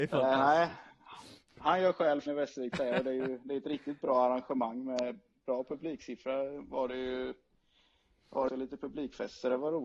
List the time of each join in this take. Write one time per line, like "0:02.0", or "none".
0:02.3
0:02.8
0:08.5